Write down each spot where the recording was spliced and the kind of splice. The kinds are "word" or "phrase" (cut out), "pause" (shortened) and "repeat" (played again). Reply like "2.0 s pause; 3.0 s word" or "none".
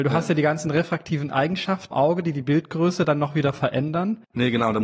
1.9 s word